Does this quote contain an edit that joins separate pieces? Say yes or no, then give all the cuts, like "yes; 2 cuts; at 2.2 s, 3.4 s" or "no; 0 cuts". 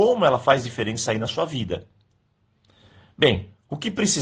no; 0 cuts